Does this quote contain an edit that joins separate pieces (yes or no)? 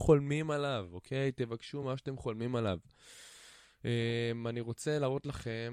no